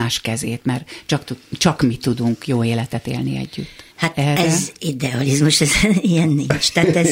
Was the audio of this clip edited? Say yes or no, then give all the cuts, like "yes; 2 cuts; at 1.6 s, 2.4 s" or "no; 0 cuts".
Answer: yes; 1 cut; at 3.9 s